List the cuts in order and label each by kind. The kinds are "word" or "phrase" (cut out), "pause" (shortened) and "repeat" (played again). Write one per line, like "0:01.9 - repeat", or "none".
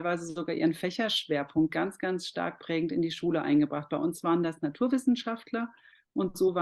none